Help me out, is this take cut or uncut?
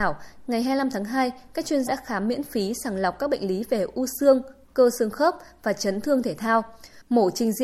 cut